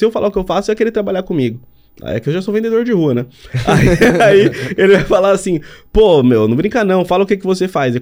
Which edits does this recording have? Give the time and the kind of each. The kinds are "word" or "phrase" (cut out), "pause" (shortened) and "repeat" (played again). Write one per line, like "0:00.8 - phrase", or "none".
0:01.9 - pause